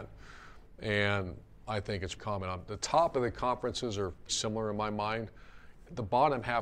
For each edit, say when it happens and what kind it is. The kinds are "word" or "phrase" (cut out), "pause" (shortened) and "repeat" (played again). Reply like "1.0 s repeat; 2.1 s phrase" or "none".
2.2 s word; 4.3 s word